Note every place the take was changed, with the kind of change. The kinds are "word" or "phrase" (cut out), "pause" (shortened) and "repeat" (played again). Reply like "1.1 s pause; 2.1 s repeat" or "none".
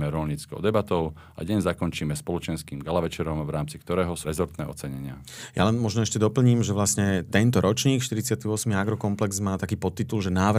4.2 s word